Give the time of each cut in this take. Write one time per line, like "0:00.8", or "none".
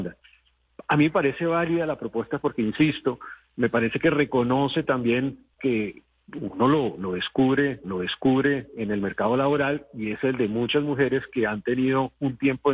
0:05.6
0:07.8